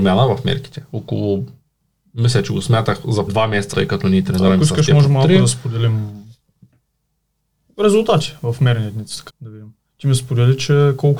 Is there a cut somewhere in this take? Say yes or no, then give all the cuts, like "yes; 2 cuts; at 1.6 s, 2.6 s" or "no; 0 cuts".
yes; 3 cuts; at 3.3 s, 3.7 s, 9.3 s